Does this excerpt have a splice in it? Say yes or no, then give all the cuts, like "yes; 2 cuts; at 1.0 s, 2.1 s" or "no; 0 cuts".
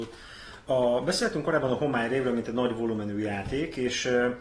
no; 0 cuts